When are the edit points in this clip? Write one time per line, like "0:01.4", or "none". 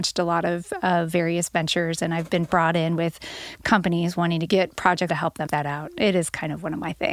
0:04.5
0:05.1
0:05.5